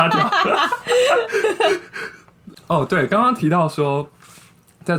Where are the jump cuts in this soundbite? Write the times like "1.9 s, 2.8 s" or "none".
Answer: none